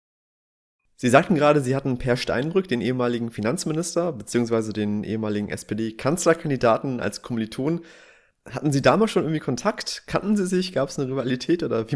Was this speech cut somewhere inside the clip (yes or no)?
no